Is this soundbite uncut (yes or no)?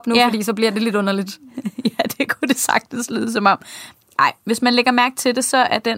yes